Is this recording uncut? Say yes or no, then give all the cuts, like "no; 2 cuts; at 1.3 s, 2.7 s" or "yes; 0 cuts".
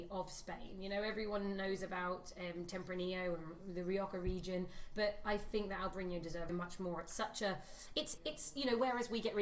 no; 2 cuts; at 6.5 s, 8.2 s